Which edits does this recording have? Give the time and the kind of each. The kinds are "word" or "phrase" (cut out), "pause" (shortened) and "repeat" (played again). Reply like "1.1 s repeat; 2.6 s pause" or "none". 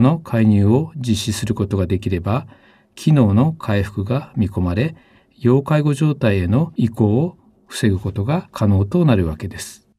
none